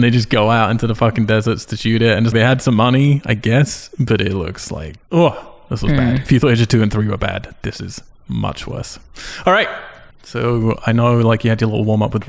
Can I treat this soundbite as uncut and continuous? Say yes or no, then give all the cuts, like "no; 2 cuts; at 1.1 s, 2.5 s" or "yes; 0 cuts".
no; 4 cuts; at 2.3 s, 5.0 s, 8.1 s, 10.1 s